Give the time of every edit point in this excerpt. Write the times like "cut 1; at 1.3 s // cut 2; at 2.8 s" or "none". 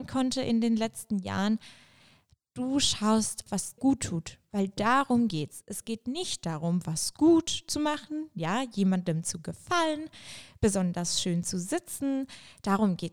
cut 1; at 3.5 s // cut 2; at 3.8 s